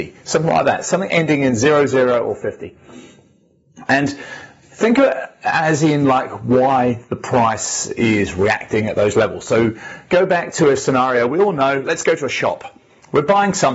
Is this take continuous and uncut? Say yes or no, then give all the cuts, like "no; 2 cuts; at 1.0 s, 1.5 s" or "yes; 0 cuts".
yes; 0 cuts